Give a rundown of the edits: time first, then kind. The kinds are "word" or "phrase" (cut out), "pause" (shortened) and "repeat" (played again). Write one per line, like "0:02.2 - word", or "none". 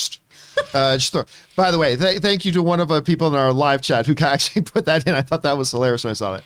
none